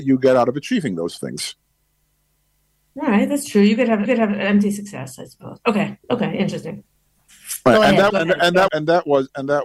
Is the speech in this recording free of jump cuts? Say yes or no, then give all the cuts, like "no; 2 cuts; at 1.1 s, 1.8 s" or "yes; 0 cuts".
no; 4 cuts; at 4.1 s, 6.0 s, 8.1 s, 8.7 s